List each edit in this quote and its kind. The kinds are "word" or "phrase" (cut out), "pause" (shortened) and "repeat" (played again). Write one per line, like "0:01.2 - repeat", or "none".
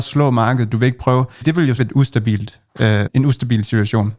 0:01.4 - word
0:01.8 - word
0:03.1 - word